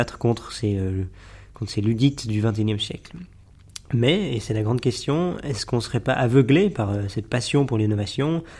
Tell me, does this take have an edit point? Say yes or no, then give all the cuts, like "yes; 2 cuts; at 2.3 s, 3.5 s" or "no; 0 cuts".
no; 0 cuts